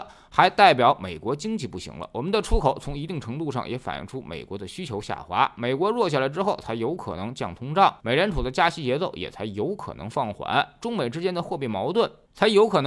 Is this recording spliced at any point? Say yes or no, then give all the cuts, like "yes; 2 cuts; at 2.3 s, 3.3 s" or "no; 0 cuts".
yes; 1 cut; at 8.0 s